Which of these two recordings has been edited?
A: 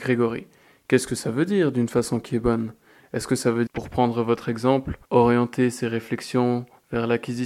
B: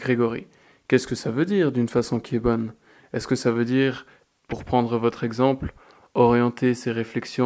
A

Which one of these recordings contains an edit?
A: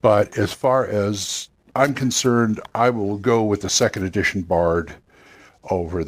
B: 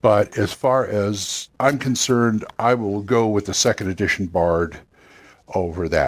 B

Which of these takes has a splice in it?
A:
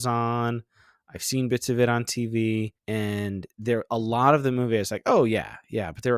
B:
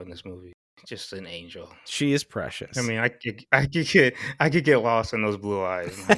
A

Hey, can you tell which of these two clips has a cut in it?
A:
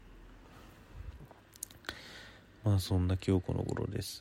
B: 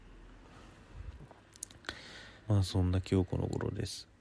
B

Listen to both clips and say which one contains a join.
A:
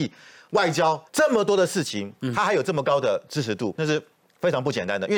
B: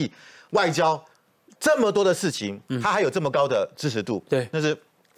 A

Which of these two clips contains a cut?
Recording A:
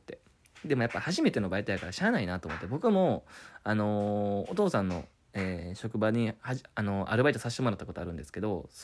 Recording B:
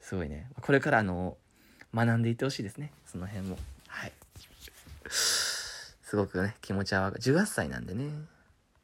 B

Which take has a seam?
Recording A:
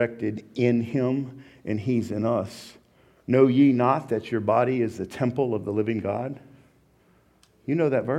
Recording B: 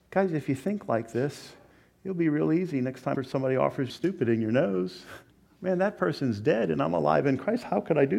B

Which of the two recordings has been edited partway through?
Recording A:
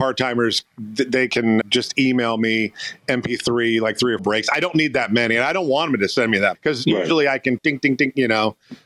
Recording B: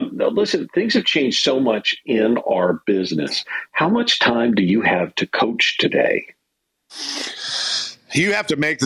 A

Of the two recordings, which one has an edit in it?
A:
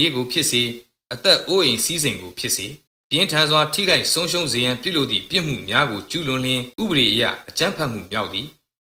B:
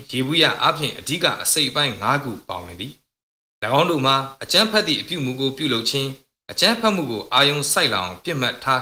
A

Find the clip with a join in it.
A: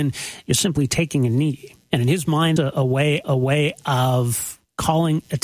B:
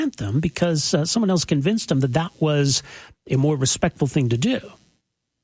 A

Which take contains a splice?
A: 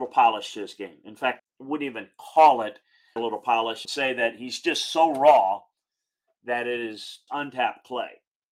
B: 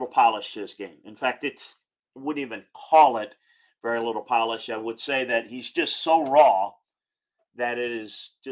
A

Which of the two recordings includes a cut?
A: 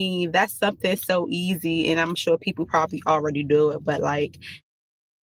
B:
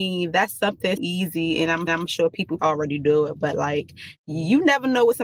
B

